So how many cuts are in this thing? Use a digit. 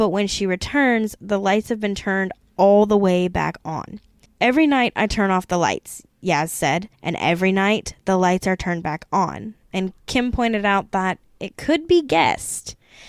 3